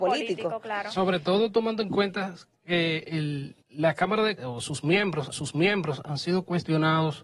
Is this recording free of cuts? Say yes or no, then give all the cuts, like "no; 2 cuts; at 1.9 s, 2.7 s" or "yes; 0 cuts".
no; 3 cuts; at 3.6 s, 4.4 s, 5.3 s